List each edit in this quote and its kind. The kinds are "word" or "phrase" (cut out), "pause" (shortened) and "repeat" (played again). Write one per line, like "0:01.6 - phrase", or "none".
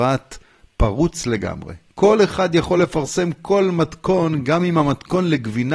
none